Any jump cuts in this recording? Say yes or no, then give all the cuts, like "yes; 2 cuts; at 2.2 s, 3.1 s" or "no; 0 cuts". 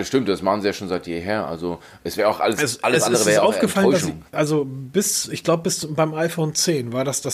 yes; 1 cut; at 4.3 s